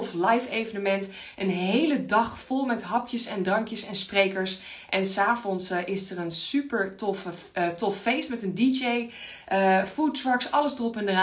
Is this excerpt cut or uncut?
uncut